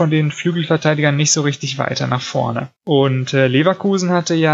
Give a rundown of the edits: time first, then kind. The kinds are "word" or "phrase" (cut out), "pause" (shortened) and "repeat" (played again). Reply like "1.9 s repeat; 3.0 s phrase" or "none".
2.8 s pause